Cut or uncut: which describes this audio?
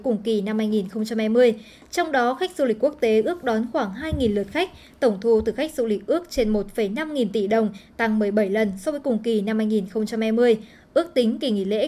uncut